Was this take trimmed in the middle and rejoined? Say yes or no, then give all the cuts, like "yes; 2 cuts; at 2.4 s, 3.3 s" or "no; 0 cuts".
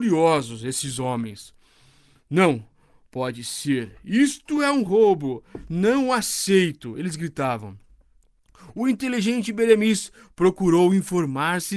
no; 0 cuts